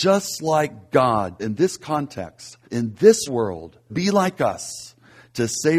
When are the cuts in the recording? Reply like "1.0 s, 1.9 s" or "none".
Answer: 1.4 s, 2.6 s, 3.3 s, 3.9 s

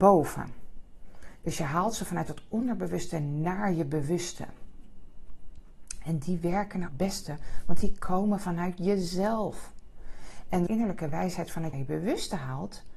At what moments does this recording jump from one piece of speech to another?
6.9 s, 10.7 s, 11.7 s

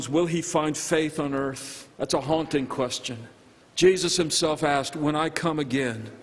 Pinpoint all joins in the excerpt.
1.9 s, 3.6 s

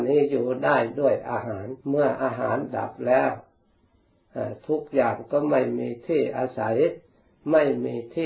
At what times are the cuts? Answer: 1.8 s

